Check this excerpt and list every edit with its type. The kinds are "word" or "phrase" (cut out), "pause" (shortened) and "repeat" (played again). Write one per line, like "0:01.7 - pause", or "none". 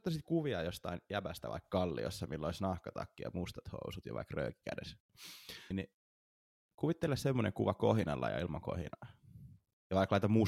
0:05.7 - word